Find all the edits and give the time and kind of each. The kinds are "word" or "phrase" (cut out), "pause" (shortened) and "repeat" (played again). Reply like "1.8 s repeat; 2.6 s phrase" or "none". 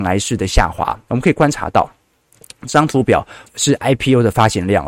3.5 s word